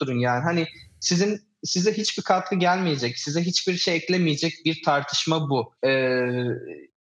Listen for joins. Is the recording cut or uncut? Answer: cut